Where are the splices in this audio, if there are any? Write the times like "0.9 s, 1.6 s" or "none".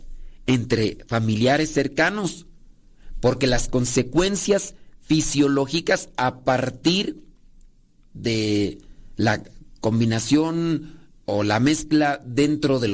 none